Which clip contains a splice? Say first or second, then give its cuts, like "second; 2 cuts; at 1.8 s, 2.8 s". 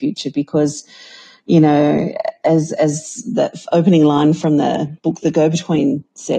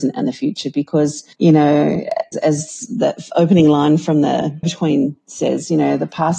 second; 3 cuts; at 1.3 s, 2.3 s, 4.6 s